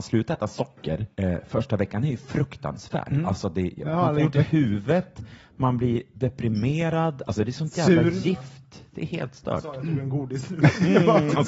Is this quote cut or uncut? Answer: cut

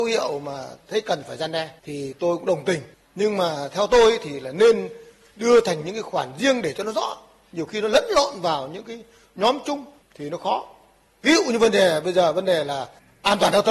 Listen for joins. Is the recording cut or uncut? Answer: uncut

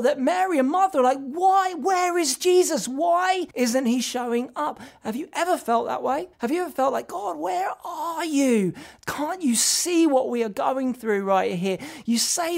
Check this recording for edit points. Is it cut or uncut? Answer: cut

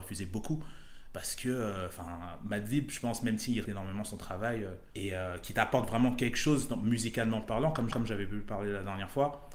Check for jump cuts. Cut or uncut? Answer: cut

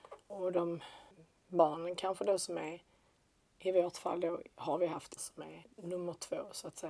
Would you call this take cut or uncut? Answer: cut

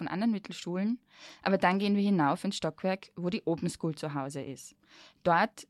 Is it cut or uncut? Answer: uncut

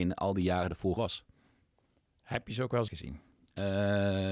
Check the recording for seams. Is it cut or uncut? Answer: cut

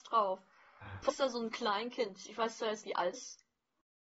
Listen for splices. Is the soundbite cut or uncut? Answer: cut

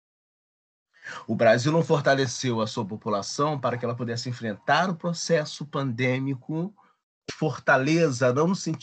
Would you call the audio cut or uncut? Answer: cut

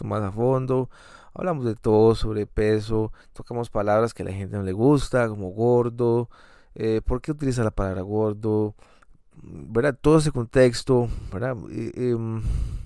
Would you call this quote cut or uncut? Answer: cut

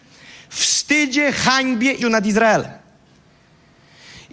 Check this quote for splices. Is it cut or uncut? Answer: cut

